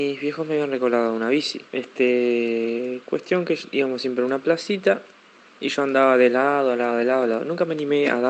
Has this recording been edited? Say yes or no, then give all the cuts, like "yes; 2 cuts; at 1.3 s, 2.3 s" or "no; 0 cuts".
yes; 2 cuts; at 1.7 s, 5.2 s